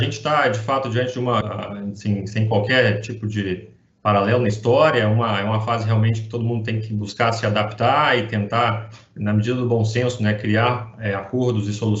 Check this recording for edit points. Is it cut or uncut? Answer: cut